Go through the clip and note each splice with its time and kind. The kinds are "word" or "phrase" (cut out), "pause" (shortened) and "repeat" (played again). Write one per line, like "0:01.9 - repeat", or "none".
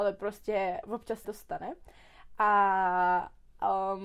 0:01.2 - word